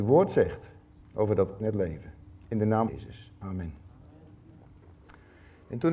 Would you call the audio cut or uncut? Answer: cut